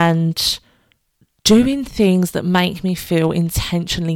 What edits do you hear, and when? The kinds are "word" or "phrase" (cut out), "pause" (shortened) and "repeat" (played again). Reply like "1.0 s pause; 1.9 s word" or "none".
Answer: none